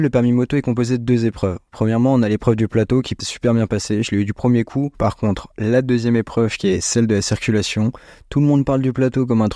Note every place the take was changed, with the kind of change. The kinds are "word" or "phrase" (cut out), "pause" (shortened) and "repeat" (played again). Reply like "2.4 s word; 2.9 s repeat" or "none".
3.2 s phrase; 4.9 s pause